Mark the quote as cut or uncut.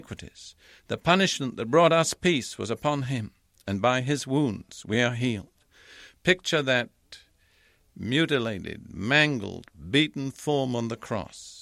uncut